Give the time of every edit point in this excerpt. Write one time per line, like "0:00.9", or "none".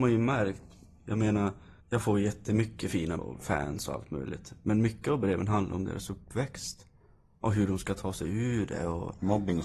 0:01.8
0:03.2